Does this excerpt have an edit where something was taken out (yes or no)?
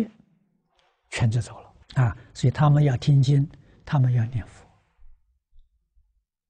yes